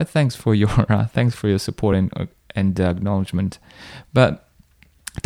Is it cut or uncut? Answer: uncut